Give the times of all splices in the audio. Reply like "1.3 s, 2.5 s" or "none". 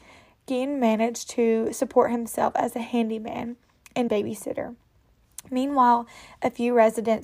4.1 s